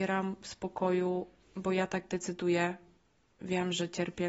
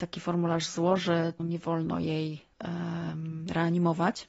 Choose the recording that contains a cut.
second; 2 cuts; at 1.4 s, 2.5 s

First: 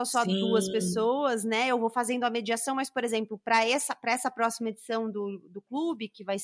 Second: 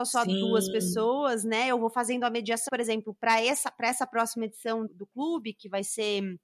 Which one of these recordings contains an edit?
second; 2 cuts; at 2.7 s, 4.9 s

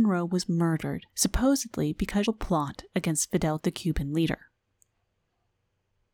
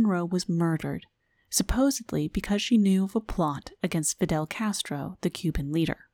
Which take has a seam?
first; 3 cuts; at 1.1 s, 2.3 s, 3.6 s

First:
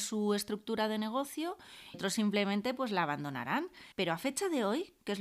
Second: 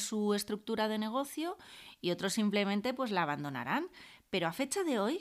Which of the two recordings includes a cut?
first; 2 cuts; at 1.9 s, 3.9 s

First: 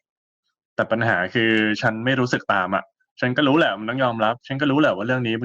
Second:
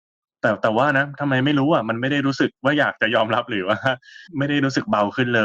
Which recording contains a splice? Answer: second; 1 cut; at 4.3 s

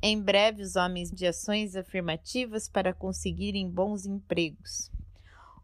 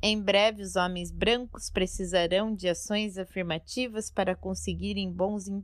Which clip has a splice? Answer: first; 1 cut; at 1.1 s

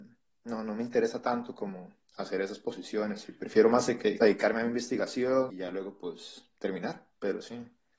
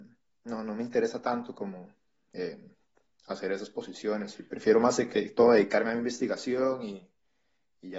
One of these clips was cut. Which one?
first; 3 cuts; at 2.0 s, 4.2 s, 5.5 s

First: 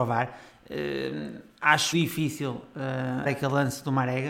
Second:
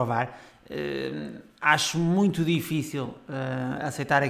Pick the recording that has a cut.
first; 2 cuts; at 1.9 s, 3.3 s

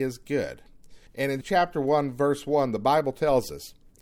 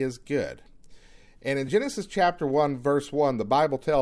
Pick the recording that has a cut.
first; 2 cuts; at 1.1 s, 1.4 s

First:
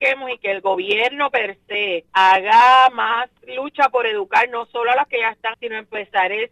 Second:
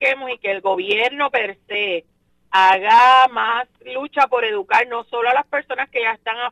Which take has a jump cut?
first; 3 cuts; at 2.1 s, 5.1 s, 5.5 s

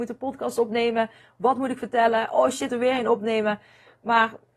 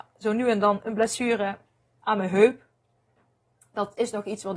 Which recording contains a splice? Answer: first; 1 cut; at 2.7 s

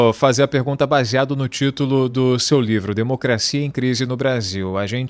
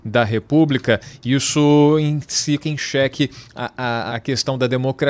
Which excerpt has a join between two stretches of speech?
second; 2 cuts; at 2.6 s, 4.1 s

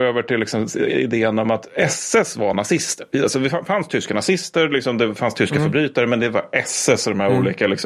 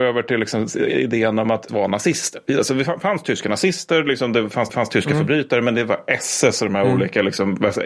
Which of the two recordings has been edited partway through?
second; 2 cuts; at 1.7 s, 4.7 s

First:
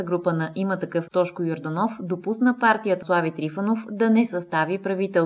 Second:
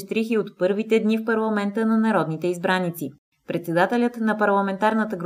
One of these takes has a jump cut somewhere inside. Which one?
first; 2 cuts; at 1.1 s, 3.0 s

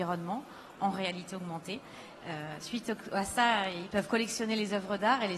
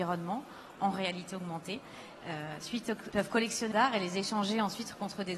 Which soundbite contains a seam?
second; 2 cuts; at 3.1 s, 3.7 s

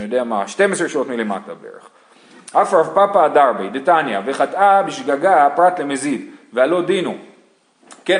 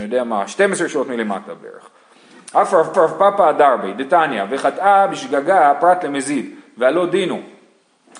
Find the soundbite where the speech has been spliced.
second; 1 cut; at 2.9 s

